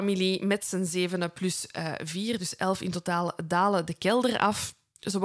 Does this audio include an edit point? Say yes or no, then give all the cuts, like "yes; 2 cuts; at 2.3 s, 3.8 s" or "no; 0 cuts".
no; 0 cuts